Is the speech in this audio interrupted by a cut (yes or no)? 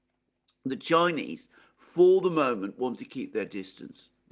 no